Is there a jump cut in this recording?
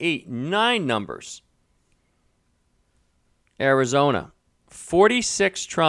no; 0 cuts

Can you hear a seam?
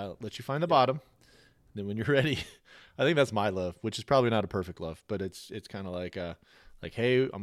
no; 0 cuts

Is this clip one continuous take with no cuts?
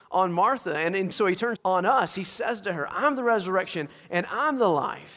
no; 2 cuts; at 1.1 s, 1.6 s

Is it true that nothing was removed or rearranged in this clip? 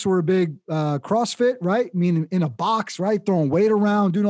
yes; 0 cuts

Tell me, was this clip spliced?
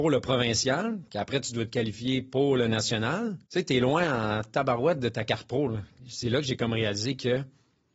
yes; 1 cut; at 3.4 s

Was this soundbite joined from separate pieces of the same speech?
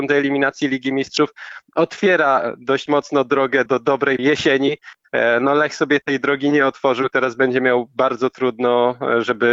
yes; 3 cuts; at 3.7 s, 4.2 s, 6.0 s

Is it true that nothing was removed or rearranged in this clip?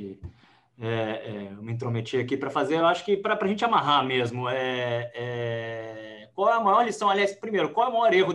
yes; 0 cuts

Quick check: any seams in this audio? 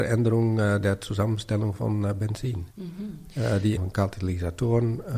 yes; 2 cuts; at 2.7 s, 3.8 s

